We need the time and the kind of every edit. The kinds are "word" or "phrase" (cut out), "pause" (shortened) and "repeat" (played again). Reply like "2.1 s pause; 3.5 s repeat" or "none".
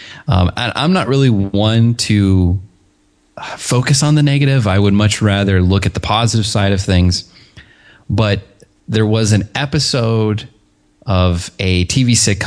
none